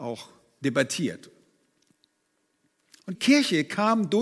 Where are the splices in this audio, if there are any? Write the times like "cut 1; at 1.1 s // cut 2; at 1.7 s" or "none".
cut 1; at 3.1 s